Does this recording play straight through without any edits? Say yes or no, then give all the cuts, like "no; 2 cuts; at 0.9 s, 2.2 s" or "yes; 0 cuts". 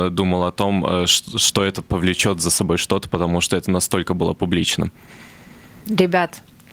yes; 0 cuts